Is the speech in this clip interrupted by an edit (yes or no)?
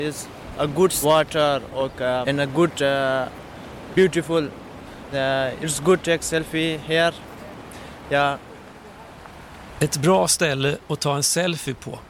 yes